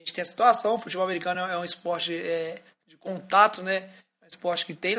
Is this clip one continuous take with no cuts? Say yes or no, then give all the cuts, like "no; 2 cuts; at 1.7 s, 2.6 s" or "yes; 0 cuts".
yes; 0 cuts